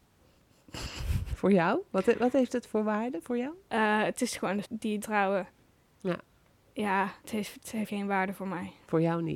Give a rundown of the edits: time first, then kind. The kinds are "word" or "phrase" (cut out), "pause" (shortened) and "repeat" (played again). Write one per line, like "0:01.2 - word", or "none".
0:04.6 - word
0:05.0 - phrase
0:07.2 - pause
0:07.9 - word